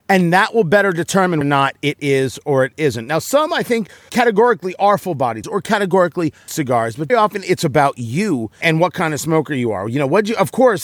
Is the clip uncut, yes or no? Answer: no